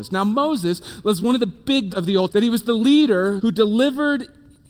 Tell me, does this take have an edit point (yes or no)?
yes